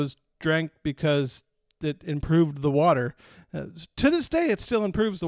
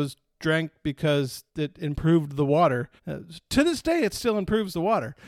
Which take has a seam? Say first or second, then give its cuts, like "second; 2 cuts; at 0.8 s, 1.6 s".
second; 2 cuts; at 1.5 s, 3.0 s